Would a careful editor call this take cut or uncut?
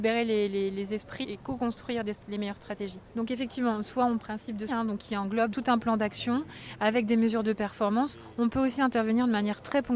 cut